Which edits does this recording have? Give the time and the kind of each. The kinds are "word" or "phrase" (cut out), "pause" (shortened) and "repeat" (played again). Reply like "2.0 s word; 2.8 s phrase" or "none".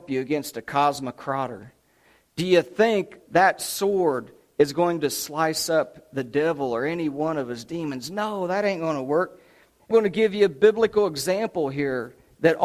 3.2 s word; 9.9 s word

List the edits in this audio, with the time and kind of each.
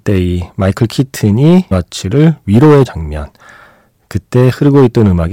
1.7 s word; 2.8 s word

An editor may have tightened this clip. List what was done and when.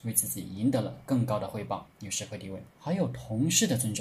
1.9 s pause; 2.7 s pause

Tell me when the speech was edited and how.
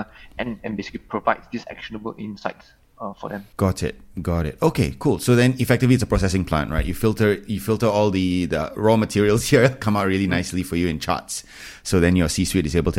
3.5 s pause

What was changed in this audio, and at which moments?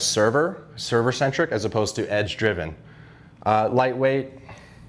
none

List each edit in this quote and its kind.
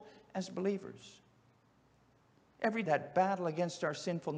2.8 s word

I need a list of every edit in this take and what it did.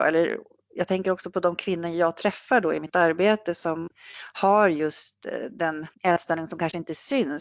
5.9 s pause

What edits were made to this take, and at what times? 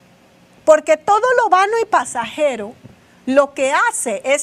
none

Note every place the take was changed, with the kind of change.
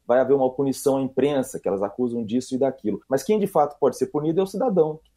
3.0 s pause

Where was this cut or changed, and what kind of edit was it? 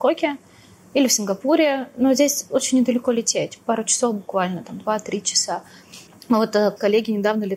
6.1 s pause

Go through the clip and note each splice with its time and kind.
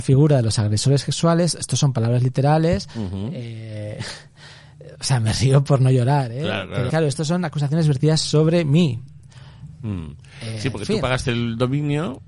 6.9 s word

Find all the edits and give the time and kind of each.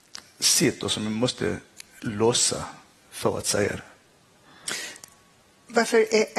none

